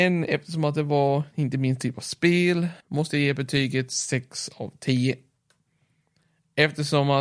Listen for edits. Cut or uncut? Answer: cut